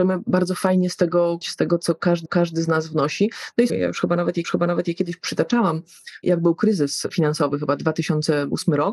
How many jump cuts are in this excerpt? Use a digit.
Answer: 4